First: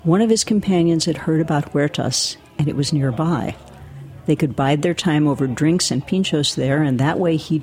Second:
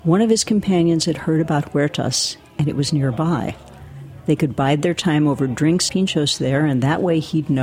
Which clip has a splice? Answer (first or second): second